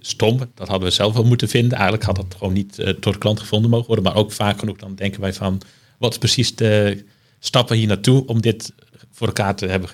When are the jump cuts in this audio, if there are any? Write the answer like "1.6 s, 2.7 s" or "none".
none